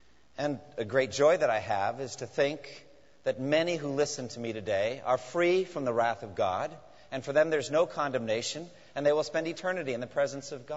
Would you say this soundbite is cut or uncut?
uncut